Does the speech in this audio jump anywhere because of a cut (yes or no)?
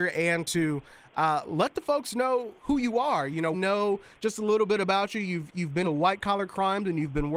yes